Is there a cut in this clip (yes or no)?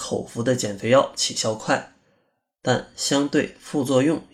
no